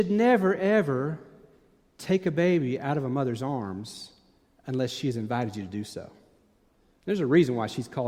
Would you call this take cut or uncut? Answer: uncut